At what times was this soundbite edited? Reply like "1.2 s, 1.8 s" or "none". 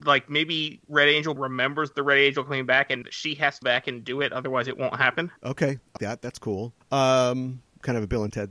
1.4 s, 3.0 s, 3.6 s, 5.4 s, 6.0 s, 6.8 s